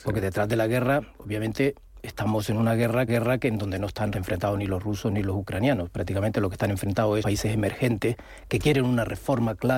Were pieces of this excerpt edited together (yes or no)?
yes